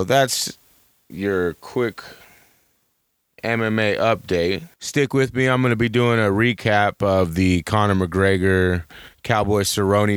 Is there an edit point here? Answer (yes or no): yes